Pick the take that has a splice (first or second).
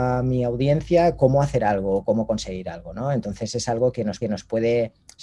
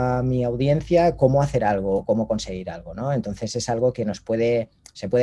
first